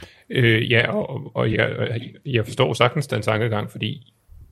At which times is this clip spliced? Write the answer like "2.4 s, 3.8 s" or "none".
none